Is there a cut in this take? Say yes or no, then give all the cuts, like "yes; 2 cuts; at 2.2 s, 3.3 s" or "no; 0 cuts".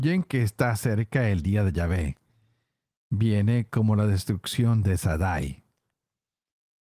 no; 0 cuts